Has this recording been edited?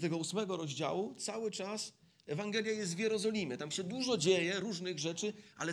no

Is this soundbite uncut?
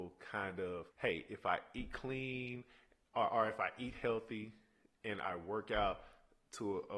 no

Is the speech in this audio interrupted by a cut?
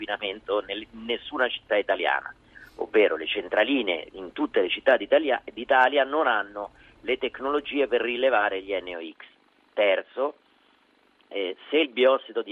no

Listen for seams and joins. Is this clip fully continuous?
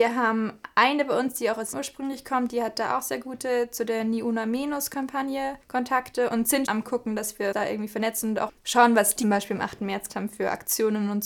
no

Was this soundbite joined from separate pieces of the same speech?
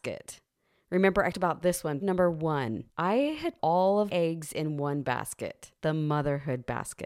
yes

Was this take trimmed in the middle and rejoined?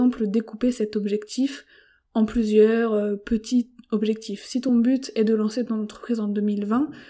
no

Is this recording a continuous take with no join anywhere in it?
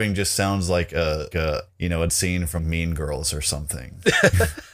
no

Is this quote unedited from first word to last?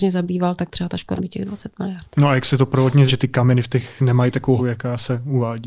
no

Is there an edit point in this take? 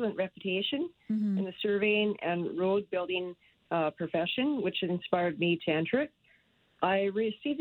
no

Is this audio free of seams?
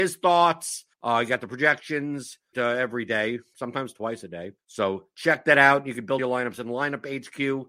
no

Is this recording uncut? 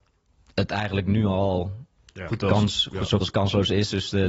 no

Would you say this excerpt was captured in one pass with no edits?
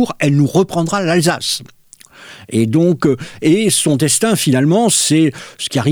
yes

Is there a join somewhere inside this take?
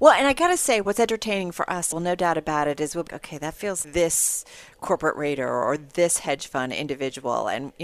yes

